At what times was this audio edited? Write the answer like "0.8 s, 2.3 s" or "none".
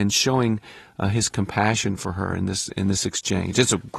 none